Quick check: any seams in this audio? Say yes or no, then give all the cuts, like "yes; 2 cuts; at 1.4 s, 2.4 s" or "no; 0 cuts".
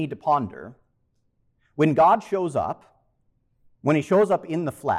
no; 0 cuts